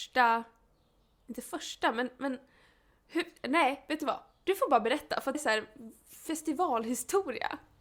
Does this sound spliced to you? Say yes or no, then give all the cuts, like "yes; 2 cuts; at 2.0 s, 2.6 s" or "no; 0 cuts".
yes; 1 cut; at 5.3 s